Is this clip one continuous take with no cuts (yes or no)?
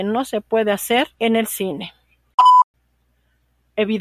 no